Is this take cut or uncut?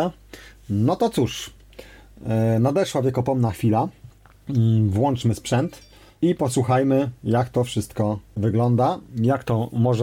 uncut